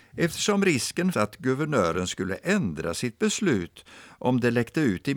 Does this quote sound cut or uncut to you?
cut